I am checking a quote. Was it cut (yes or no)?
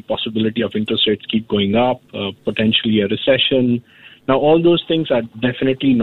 no